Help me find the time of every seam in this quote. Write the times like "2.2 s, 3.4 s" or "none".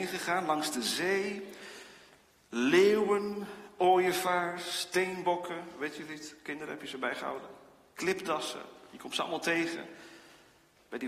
none